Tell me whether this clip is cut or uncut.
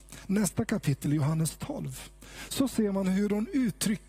uncut